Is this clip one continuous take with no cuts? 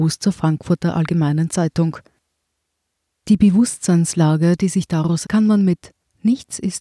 no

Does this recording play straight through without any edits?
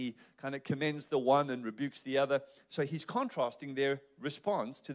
yes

